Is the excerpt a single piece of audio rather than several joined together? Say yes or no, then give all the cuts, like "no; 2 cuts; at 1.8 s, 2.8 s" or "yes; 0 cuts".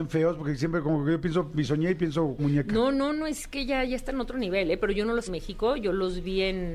no; 2 cuts; at 2.4 s, 5.3 s